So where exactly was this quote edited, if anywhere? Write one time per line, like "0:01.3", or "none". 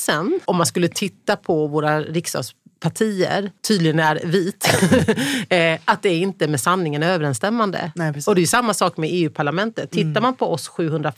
0:03.6